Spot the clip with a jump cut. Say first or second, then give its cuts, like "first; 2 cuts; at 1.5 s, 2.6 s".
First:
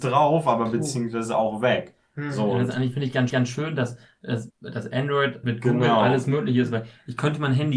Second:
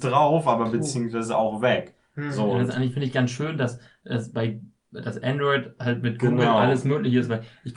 first; 3 cuts; at 3.3 s, 4.5 s, 5.4 s